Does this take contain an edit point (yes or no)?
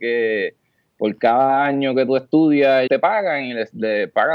yes